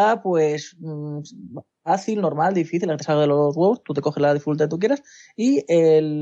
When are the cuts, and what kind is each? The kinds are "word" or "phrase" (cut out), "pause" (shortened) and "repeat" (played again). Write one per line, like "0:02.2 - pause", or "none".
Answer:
none

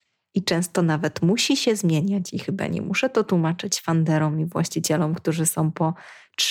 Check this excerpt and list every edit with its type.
none

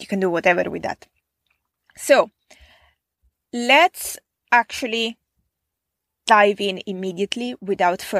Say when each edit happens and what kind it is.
none

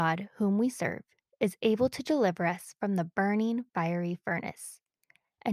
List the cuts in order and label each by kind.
none

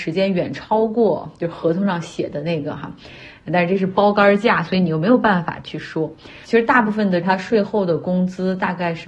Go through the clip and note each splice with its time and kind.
0:07.2 - word

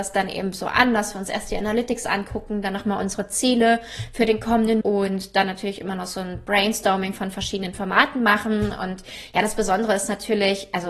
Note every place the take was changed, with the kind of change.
0:04.8 - word

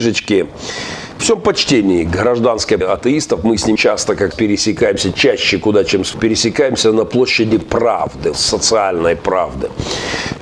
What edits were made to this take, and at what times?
0:01.2 - word
0:02.8 - word
0:03.8 - word
0:04.3 - word
0:06.1 - word
0:08.3 - word

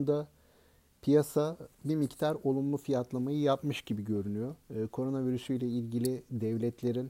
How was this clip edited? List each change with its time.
0:01.7 - pause
0:04.6 - pause

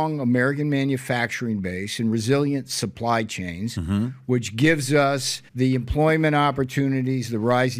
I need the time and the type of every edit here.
0:05.5 - pause

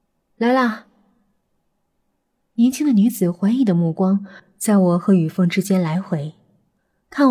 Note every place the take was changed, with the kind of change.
none

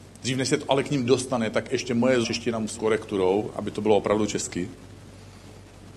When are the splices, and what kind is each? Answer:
0:02.2 - word
0:02.8 - word

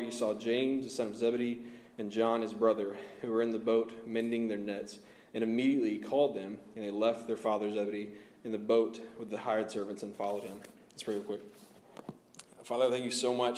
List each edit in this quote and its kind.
none

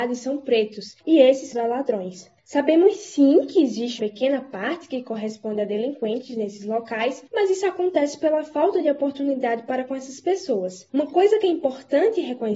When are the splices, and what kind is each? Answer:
0:01.0 - pause
0:01.5 - word
0:02.4 - pause
0:04.0 - word
0:07.3 - pause
0:10.9 - pause

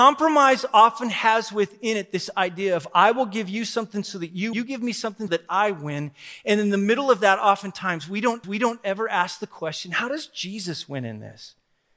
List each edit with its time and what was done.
0:04.5 - phrase
0:05.3 - word
0:08.4 - repeat

